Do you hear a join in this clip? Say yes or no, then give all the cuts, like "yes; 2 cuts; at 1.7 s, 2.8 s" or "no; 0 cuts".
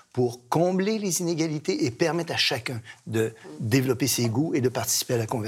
no; 0 cuts